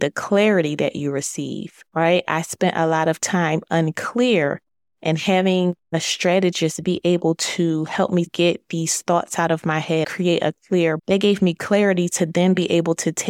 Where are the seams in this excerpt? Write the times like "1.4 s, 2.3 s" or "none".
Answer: 8.3 s, 10.0 s, 11.0 s